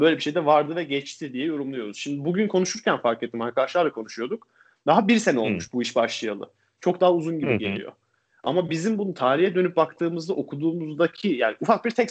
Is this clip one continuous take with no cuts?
yes; 0 cuts

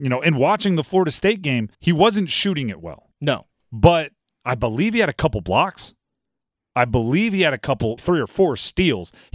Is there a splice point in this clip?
yes; 3 cuts; at 1.7 s, 3.1 s, 8.0 s

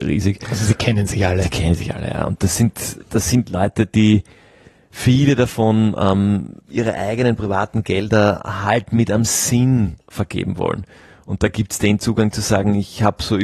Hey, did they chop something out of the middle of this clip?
yes; 2 cuts; at 6.6 s, 10.0 s

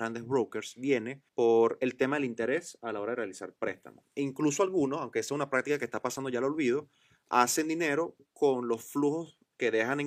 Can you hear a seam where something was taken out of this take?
yes; 1 cut; at 1.3 s

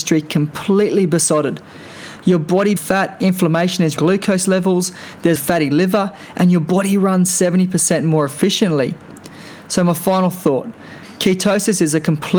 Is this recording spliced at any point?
yes; 3 cuts; at 2.8 s, 4.0 s, 5.4 s

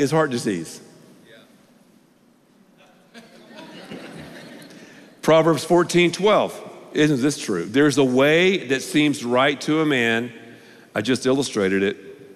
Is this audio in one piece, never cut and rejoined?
yes; 0 cuts

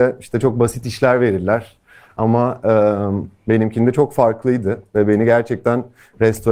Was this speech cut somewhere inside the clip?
no; 0 cuts

